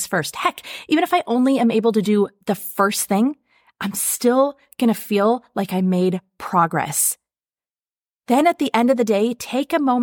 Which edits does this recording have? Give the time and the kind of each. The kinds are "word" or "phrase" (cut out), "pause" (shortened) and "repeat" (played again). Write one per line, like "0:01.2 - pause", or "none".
none